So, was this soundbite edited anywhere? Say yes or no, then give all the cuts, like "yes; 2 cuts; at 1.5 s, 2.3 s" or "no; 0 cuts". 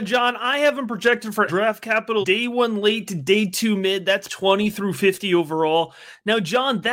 yes; 3 cuts; at 1.5 s, 2.2 s, 4.3 s